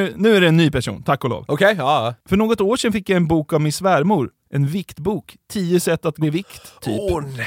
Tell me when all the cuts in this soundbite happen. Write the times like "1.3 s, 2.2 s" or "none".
6.2 s